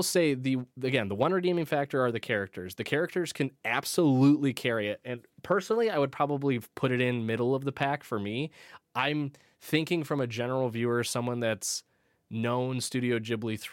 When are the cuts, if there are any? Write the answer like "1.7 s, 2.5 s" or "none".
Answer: 8.8 s